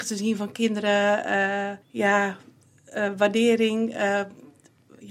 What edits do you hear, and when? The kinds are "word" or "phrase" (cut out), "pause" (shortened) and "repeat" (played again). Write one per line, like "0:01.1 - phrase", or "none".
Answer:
0:01.8 - pause